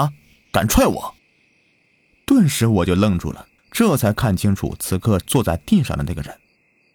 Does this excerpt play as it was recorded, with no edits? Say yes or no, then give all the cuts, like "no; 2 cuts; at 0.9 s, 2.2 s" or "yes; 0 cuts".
no; 2 cuts; at 1.2 s, 3.6 s